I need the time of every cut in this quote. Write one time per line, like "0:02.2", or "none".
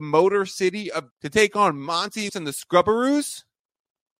0:01.1
0:02.3